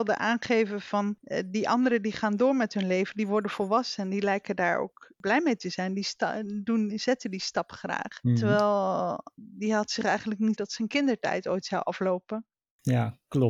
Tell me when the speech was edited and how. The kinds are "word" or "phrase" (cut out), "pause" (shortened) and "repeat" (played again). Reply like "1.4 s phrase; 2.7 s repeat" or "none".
9.4 s phrase; 10.6 s word